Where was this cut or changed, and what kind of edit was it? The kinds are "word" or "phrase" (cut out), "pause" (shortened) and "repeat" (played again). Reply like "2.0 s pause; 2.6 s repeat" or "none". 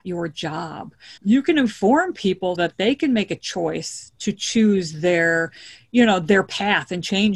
1.2 s pause; 2.6 s word